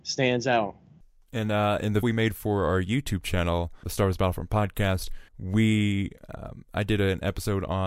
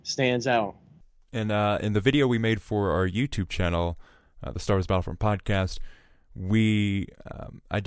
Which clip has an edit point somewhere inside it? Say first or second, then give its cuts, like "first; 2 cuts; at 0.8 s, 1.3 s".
first; 3 cuts; at 2.0 s, 3.8 s, 5.3 s